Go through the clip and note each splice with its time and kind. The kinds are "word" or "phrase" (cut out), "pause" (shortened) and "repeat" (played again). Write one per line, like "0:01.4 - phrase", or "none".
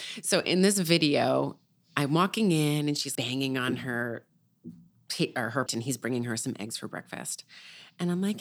0:03.1 - word
0:05.7 - word